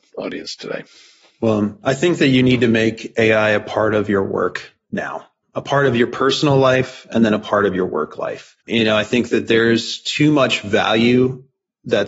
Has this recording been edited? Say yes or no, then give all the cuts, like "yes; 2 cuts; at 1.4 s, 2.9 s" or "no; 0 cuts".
yes; 1 cut; at 8.6 s